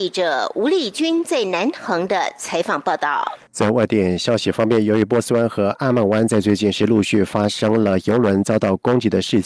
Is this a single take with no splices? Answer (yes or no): no